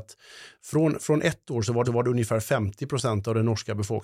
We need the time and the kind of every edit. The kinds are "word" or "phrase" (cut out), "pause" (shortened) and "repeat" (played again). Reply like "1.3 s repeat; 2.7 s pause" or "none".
1.8 s repeat